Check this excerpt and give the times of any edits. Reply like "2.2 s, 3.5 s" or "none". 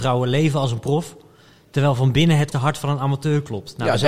2.5 s

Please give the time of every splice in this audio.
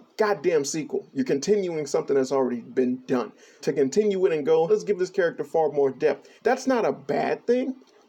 3.6 s, 4.7 s, 6.4 s

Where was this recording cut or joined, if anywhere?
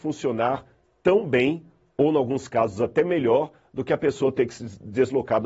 none

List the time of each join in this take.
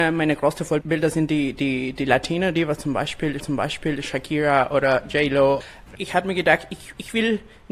3.4 s

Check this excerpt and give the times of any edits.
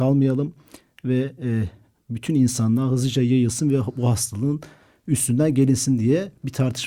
none

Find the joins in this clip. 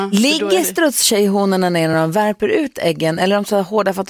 none

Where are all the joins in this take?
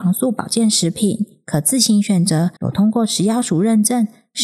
2.6 s

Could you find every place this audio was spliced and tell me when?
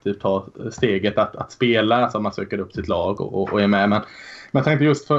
none

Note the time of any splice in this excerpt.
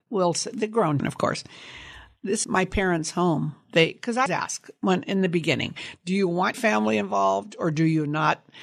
1.0 s, 2.4 s, 4.3 s, 6.5 s

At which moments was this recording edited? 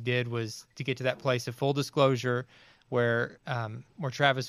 none

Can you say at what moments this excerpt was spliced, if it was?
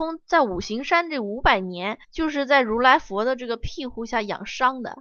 2.0 s

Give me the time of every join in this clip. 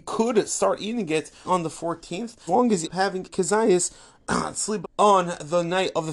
1.4 s, 2.5 s, 2.8 s, 3.3 s, 4.8 s

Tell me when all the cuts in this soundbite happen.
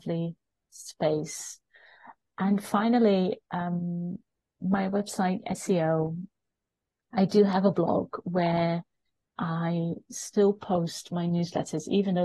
none

